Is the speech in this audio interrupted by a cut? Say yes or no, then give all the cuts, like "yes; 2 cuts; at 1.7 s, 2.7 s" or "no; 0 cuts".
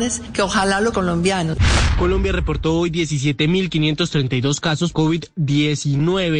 yes; 2 cuts; at 0.9 s, 4.9 s